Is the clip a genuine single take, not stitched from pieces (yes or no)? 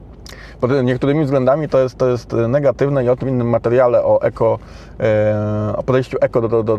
no